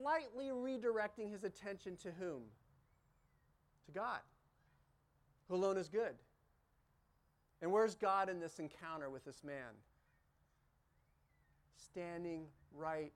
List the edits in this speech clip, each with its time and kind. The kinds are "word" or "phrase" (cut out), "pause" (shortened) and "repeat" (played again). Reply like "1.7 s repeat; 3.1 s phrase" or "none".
none